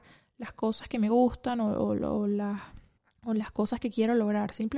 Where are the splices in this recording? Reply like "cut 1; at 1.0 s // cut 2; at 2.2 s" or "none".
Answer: cut 1; at 3.0 s